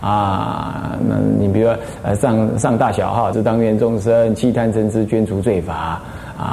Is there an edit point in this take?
yes; 1 cut; at 3.3 s

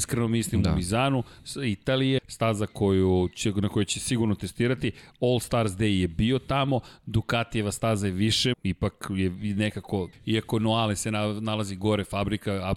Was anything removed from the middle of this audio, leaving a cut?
yes; 3 cuts; at 2.2 s, 8.5 s, 10.1 s

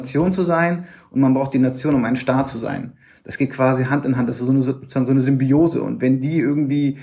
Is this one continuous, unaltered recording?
yes; 0 cuts

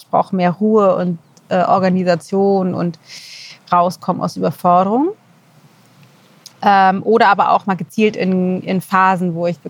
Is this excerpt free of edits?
yes; 0 cuts

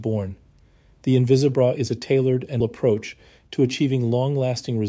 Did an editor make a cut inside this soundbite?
yes; 1 cut; at 2.6 s

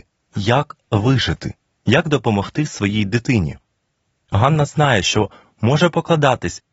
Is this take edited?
no; 0 cuts

